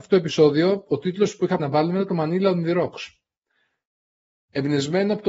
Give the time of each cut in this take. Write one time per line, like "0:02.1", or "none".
0:01.6